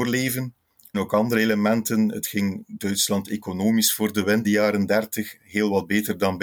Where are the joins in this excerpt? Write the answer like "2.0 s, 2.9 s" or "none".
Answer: 0.9 s, 2.2 s, 4.4 s